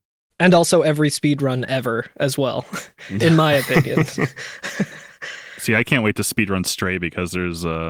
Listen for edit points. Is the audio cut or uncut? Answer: uncut